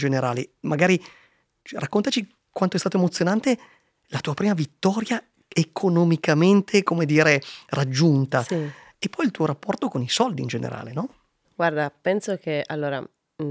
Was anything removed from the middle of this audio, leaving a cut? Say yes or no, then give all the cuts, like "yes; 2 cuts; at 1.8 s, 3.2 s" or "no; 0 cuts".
no; 0 cuts